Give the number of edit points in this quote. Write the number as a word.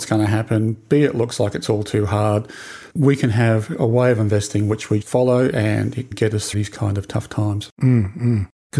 four